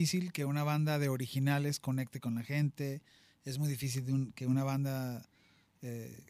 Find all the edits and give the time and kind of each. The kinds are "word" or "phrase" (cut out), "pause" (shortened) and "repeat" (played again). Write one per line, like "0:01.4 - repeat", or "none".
none